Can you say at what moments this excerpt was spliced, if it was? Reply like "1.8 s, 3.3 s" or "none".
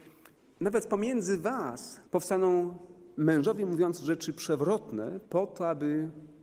2.1 s, 5.2 s